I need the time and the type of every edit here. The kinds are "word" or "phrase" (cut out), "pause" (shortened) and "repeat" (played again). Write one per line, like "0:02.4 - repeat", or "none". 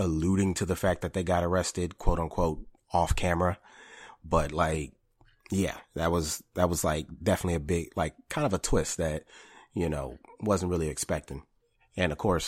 none

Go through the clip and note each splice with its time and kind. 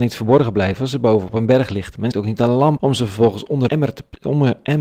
0:02.1 - word
0:02.8 - word
0:03.7 - word

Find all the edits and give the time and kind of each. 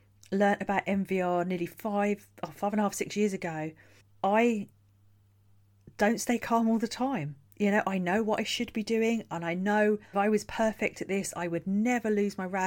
0:04.0 - pause
0:10.1 - phrase

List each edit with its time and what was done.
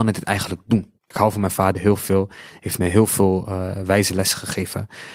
0:01.0 - pause

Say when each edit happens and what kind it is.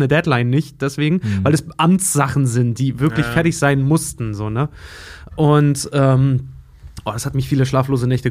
none

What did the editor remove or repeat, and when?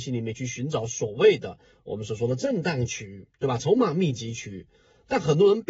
none

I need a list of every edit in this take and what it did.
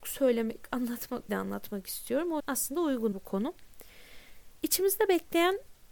0:01.3 - phrase
0:02.4 - word
0:03.1 - word

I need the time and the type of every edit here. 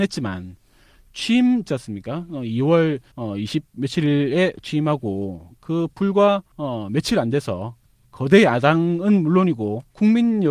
0:01.7 - word
0:03.1 - pause

